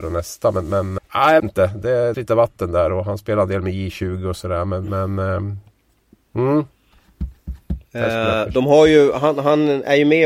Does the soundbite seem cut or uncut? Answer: cut